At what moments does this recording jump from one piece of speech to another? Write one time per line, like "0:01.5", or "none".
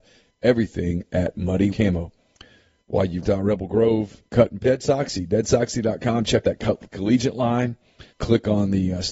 0:01.7
0:03.2
0:04.2
0:04.6
0:06.4
0:08.1